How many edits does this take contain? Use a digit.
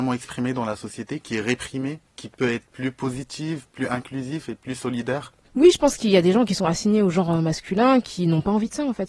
1